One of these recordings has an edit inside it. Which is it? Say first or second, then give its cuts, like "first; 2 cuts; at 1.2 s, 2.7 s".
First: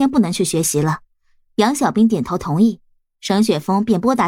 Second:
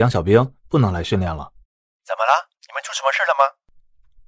second; 2 cuts; at 1.6 s, 2.6 s